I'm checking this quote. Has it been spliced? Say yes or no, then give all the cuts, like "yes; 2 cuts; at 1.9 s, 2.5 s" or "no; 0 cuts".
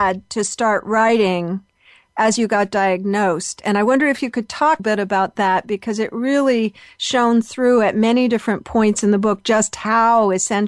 yes; 1 cut; at 4.8 s